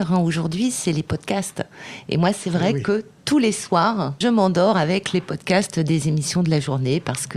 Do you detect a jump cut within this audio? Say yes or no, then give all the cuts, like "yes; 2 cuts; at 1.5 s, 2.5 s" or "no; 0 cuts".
yes; 1 cut; at 4.2 s